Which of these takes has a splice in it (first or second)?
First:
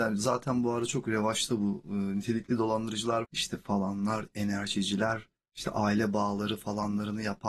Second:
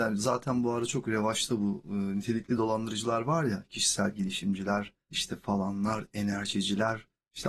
first